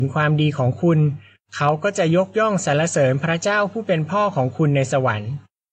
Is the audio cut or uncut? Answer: uncut